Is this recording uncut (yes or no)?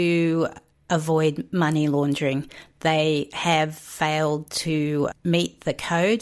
yes